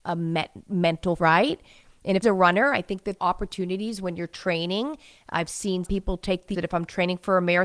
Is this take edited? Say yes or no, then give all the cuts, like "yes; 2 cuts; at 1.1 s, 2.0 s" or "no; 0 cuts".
yes; 5 cuts; at 1.2 s, 2.2 s, 3.2 s, 5.8 s, 6.5 s